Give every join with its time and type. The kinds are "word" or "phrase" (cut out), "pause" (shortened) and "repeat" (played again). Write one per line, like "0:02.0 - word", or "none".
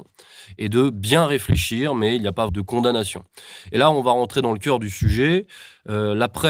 0:02.5 - phrase